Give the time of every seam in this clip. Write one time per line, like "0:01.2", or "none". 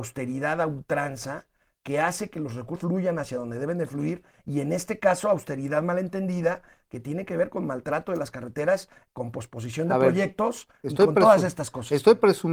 0:02.8